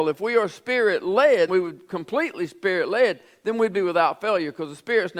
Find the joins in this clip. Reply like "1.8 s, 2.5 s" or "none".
1.5 s